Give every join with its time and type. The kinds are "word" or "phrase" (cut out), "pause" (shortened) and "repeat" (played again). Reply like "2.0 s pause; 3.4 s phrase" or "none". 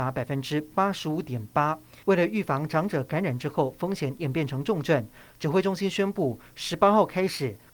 2.0 s pause